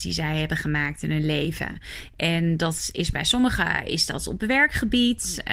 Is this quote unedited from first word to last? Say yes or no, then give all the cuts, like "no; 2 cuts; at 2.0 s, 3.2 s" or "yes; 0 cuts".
yes; 0 cuts